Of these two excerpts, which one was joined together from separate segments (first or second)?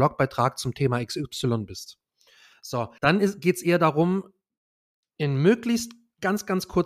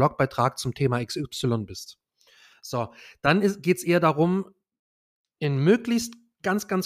first